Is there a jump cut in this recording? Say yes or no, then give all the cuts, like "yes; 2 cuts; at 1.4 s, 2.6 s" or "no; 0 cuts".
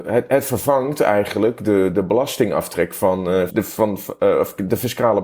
yes; 2 cuts; at 1.9 s, 3.5 s